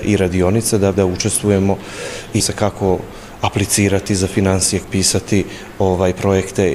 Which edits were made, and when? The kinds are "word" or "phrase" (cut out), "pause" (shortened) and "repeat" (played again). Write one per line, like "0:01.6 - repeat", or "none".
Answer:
0:00.9 - phrase
0:02.4 - word
0:04.8 - word